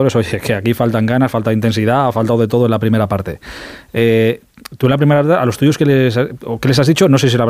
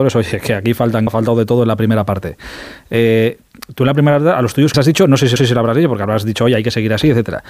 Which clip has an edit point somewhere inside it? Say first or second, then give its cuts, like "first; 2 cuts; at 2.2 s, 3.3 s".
second; 3 cuts; at 1.1 s, 4.7 s, 5.4 s